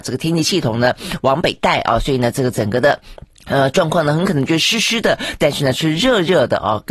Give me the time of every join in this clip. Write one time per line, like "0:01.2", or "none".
0:03.3